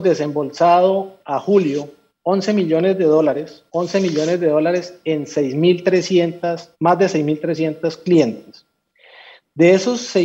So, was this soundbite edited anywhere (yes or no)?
yes